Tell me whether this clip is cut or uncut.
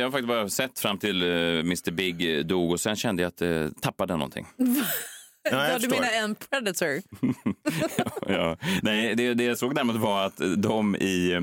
uncut